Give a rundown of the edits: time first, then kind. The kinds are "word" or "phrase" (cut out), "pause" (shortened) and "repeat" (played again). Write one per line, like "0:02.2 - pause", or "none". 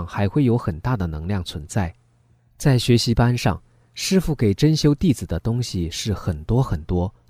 none

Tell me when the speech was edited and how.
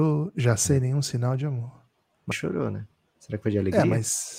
0:02.3 - word

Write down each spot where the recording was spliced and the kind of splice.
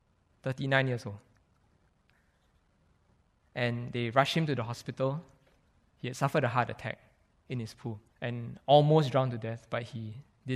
0:08.1 - pause

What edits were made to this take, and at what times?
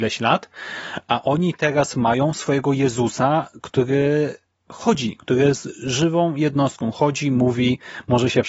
none

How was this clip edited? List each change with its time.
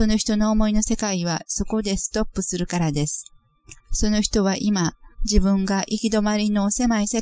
0:03.8 - pause
0:05.1 - pause

